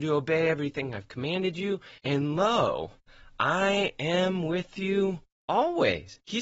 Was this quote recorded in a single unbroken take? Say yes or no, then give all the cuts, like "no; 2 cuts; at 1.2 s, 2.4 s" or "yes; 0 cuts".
no; 2 cuts; at 2.0 s, 5.3 s